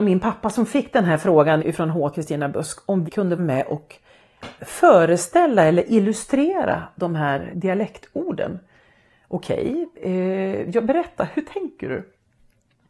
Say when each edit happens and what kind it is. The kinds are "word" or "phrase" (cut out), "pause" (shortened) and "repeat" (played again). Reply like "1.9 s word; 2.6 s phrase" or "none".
1.6 s word; 2.1 s word; 3.1 s word; 3.4 s word; 4.6 s word; 7.5 s word